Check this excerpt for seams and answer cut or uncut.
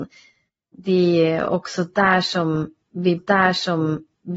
cut